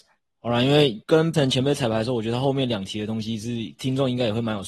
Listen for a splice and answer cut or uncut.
cut